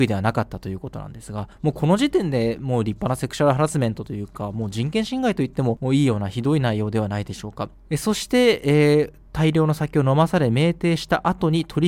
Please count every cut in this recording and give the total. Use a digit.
1